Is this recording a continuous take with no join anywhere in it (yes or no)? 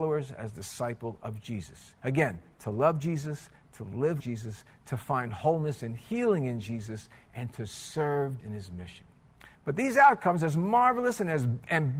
no